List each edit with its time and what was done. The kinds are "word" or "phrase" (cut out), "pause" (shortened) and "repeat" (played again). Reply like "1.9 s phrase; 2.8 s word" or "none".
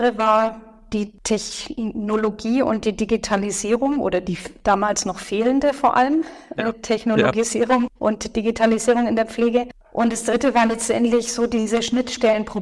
8.0 s pause